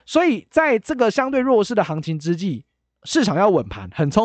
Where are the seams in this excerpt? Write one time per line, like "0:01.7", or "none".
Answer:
none